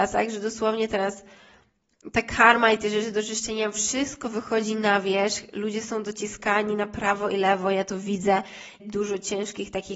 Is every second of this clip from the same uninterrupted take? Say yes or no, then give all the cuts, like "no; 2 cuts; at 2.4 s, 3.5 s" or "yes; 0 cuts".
no; 1 cut; at 8.8 s